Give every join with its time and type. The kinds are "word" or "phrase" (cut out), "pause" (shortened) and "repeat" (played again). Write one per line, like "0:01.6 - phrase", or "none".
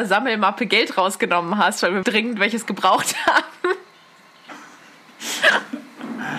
0:02.0 - word